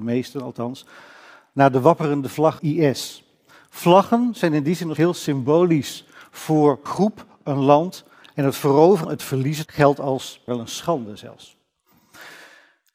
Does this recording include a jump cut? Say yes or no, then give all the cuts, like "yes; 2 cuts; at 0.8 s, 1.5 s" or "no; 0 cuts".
yes; 6 cuts; at 2.6 s, 5.0 s, 6.9 s, 9.0 s, 9.7 s, 10.5 s